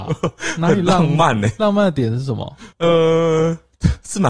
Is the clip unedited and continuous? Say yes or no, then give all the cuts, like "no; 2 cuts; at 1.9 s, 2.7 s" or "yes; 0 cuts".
no; 1 cut; at 2.7 s